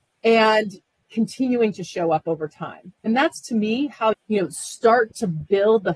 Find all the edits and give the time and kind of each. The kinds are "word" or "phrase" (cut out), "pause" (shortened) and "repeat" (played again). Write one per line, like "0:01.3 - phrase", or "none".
0:03.0 - pause
0:04.1 - word